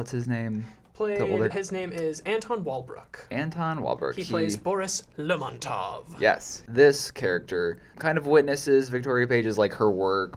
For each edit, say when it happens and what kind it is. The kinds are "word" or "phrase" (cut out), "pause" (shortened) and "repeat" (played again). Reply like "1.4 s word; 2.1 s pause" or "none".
1.5 s word